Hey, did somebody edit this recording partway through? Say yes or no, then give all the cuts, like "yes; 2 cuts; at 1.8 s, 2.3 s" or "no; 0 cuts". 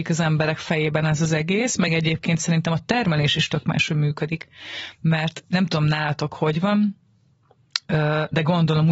no; 0 cuts